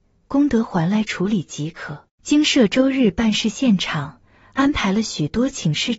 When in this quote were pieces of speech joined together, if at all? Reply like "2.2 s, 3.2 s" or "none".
2.1 s